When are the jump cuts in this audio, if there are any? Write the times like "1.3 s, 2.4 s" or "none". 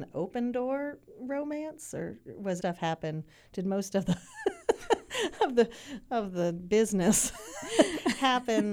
2.6 s